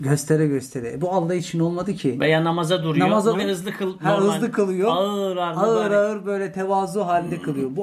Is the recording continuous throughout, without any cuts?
no; 1 cut; at 3.3 s

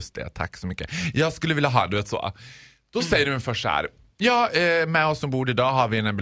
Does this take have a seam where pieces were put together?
no; 0 cuts

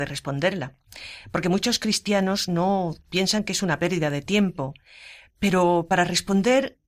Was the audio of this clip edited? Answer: no; 0 cuts

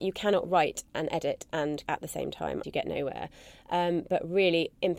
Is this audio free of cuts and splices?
no; 2 cuts; at 1.9 s, 2.6 s

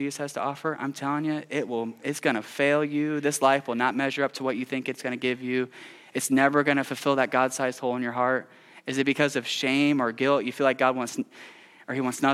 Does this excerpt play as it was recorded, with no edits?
yes; 0 cuts

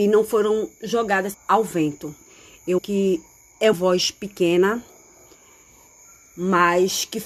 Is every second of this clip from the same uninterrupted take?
no; 3 cuts; at 1.3 s, 2.8 s, 3.7 s

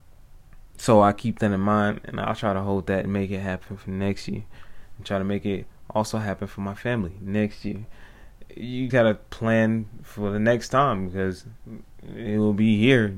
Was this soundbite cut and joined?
yes; 1 cut; at 8.9 s

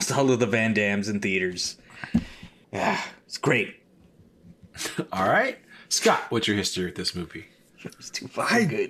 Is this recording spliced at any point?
yes; 2 cuts; at 2.6 s, 3.8 s

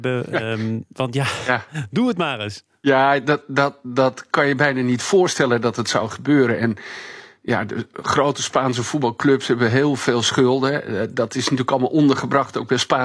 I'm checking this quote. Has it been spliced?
yes; 1 cut; at 2.8 s

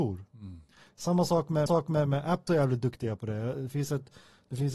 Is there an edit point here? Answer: yes; 2 cuts; at 1.7 s, 2.5 s

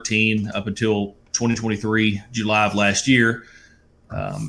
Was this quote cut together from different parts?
no; 0 cuts

